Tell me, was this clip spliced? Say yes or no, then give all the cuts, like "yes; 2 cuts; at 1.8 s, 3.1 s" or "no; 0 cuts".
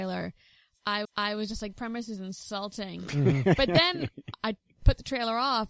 yes; 3 cuts; at 1.0 s, 1.7 s, 4.3 s